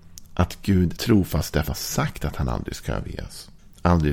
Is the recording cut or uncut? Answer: cut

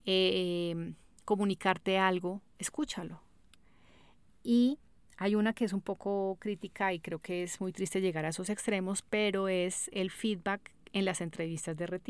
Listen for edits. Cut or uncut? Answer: cut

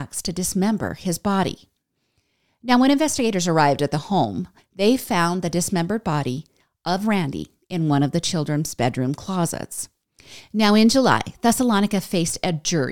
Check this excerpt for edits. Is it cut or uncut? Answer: uncut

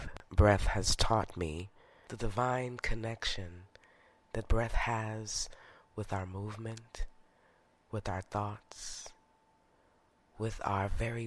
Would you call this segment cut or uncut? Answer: uncut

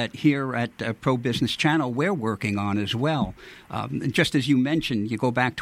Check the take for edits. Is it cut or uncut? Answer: uncut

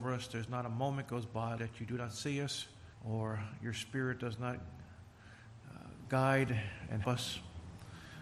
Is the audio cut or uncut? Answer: cut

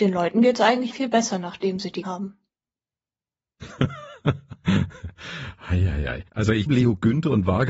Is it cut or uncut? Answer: cut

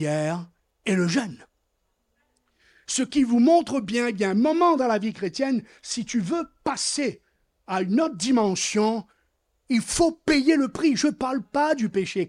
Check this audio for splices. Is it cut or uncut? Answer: uncut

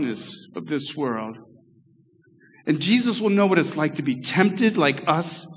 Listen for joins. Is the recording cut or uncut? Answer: uncut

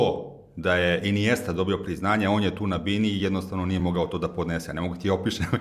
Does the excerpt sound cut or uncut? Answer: uncut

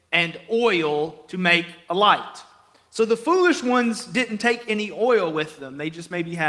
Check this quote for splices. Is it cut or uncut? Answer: uncut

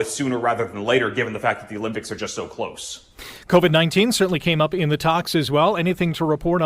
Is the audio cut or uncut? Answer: uncut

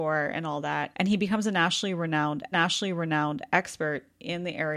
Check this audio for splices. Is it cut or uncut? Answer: cut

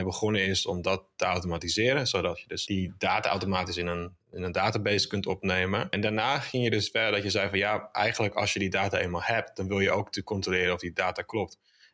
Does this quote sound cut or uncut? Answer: uncut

